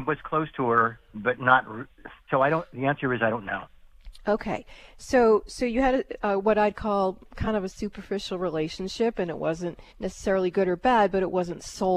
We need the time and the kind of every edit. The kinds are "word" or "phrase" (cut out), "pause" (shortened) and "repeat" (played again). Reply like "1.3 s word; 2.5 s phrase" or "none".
2.2 s pause; 9.9 s pause